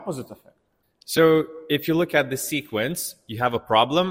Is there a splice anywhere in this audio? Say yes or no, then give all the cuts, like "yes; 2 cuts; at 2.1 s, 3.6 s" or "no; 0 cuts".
no; 0 cuts